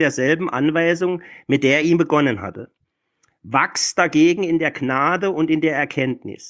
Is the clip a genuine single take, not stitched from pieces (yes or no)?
yes